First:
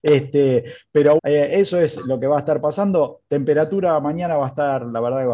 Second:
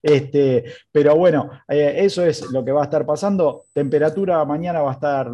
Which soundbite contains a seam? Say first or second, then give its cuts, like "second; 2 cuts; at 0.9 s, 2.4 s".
first; 1 cut; at 1.2 s